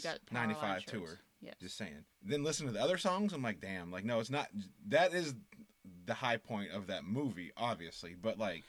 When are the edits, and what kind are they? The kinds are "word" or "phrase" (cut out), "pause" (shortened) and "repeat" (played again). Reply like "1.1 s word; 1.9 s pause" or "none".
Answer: 2.1 s pause